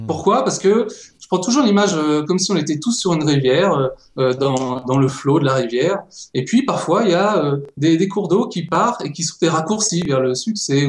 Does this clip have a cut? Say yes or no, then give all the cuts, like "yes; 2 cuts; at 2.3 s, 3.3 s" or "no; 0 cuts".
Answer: no; 0 cuts